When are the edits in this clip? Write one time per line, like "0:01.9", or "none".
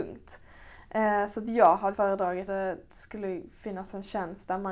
0:01.9
0:02.5